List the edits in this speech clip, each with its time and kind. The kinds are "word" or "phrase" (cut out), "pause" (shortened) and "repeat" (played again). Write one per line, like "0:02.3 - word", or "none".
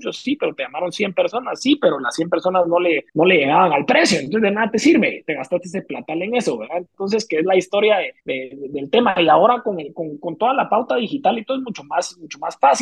0:03.1 - pause
0:08.2 - pause